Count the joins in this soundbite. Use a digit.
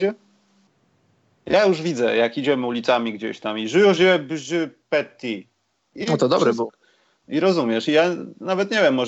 0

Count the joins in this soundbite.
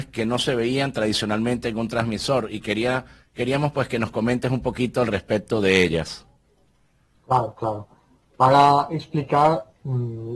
0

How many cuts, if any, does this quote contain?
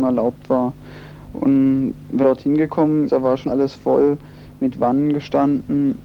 3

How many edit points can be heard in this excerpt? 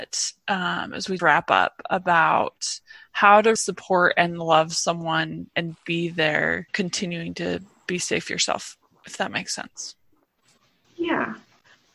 4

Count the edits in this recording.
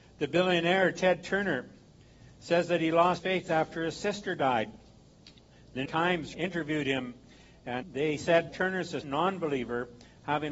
6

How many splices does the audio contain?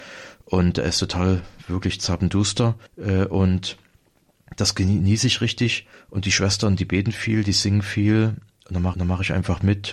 3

